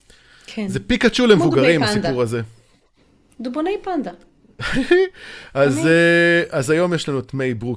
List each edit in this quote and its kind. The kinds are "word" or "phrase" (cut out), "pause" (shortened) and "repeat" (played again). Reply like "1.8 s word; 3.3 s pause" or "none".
none